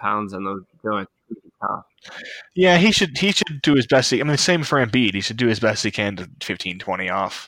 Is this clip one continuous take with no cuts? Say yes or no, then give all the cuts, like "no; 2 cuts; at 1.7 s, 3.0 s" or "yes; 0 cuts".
no; 1 cut; at 6.4 s